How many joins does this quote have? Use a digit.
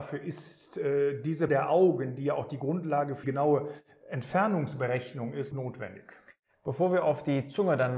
3